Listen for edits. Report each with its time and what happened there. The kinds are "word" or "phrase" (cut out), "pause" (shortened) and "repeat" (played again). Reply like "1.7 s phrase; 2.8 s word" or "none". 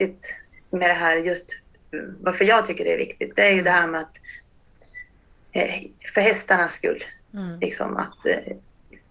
none